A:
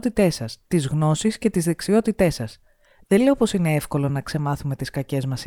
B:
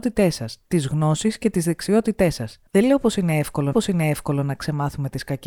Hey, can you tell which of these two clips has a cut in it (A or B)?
B